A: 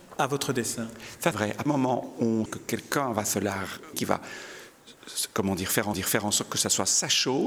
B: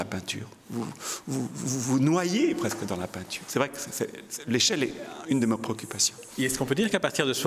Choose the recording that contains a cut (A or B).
A